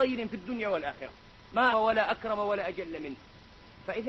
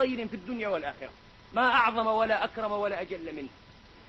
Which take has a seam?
first; 1 cut; at 1.7 s

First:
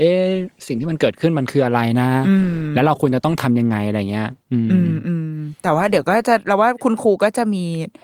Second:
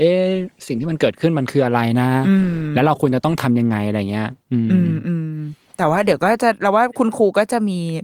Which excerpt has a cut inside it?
first; 1 cut; at 5.6 s

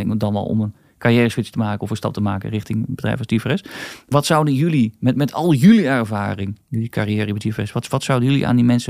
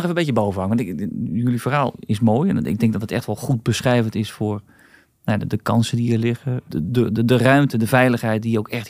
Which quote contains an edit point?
first; 1 cut; at 6.6 s

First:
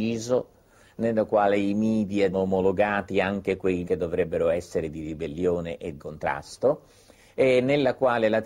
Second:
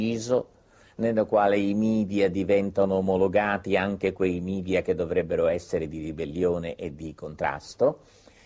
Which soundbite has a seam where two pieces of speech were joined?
first; 3 cuts; at 2.3 s, 3.8 s, 6.0 s

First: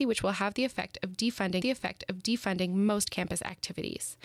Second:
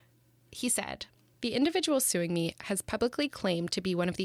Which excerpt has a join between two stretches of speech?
first; 1 cut; at 1.6 s

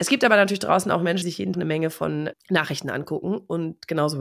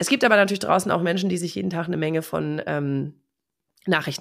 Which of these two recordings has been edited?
first; 3 cuts; at 1.2 s, 1.5 s, 2.3 s

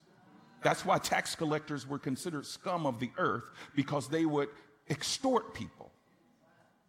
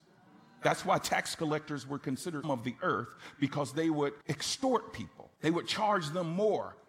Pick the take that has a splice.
second; 3 cuts; at 2.4 s, 4.2 s, 5.4 s

